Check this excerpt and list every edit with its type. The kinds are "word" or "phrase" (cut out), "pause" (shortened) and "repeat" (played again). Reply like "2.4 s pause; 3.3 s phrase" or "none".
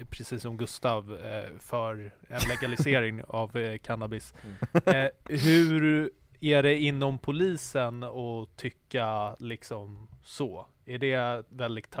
none